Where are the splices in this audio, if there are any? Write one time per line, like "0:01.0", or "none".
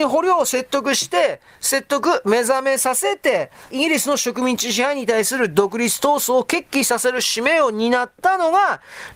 0:03.7